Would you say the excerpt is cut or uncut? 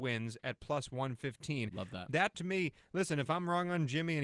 cut